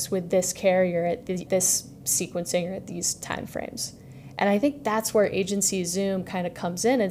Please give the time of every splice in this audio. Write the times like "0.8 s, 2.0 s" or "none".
1.5 s